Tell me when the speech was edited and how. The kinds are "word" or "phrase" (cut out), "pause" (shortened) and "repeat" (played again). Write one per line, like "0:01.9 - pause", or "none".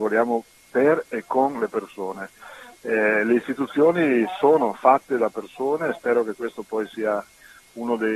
none